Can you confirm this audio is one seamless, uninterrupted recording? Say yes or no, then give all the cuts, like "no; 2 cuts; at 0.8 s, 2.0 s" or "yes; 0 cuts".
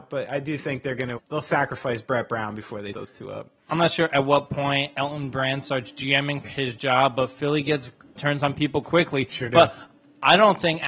no; 4 cuts; at 1.2 s, 2.9 s, 6.4 s, 8.8 s